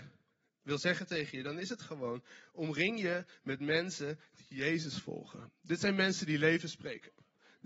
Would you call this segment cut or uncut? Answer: uncut